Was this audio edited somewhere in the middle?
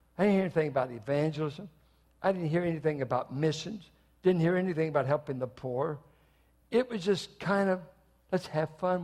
no; 0 cuts

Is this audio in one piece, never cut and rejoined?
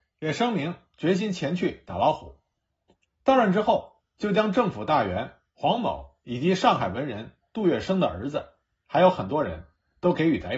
yes; 0 cuts

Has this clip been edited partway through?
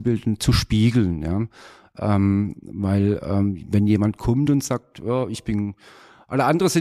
no; 0 cuts

